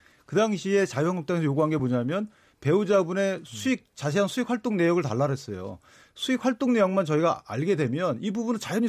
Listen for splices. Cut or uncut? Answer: uncut